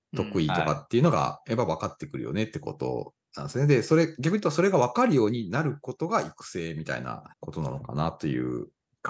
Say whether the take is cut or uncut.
cut